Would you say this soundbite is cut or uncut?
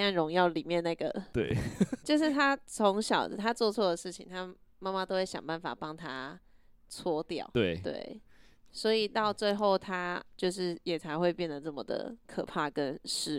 uncut